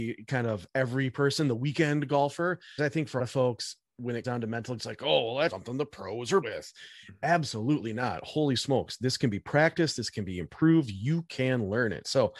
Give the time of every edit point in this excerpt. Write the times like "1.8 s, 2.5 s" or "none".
2.8 s, 3.2 s, 4.2 s, 4.8 s, 5.5 s, 6.4 s